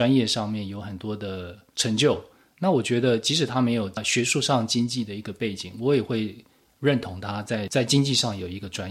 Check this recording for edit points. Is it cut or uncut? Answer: uncut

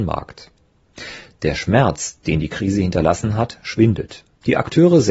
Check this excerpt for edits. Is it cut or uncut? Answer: uncut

